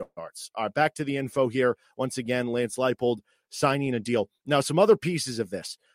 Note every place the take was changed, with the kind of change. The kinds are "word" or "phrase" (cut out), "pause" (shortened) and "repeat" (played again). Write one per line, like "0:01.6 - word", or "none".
none